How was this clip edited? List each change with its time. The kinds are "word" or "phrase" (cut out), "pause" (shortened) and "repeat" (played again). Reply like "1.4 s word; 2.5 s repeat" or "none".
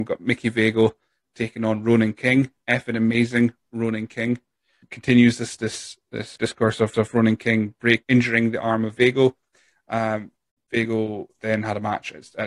4.8 s phrase; 6.4 s word; 6.9 s repeat; 8.0 s word